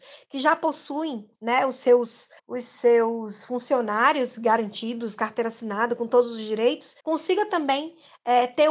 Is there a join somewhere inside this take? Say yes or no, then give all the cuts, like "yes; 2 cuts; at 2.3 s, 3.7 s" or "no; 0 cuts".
yes; 3 cuts; at 1.4 s, 2.4 s, 7.0 s